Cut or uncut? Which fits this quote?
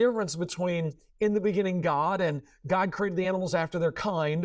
uncut